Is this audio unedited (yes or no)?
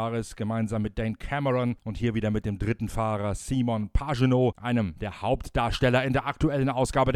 yes